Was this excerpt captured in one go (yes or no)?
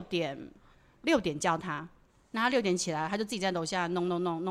no